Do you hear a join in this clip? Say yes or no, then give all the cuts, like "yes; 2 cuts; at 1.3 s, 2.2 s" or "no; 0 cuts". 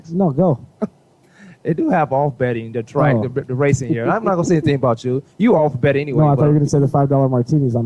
no; 0 cuts